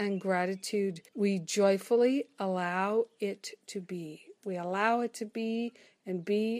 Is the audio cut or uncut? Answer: cut